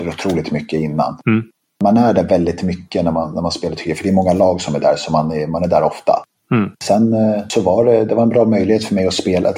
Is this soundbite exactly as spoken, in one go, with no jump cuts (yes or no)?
yes